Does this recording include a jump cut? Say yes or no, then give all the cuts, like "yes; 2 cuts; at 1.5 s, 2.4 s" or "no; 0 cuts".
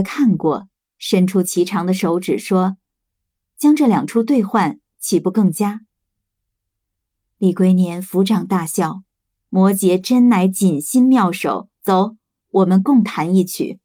yes; 1 cut; at 9.1 s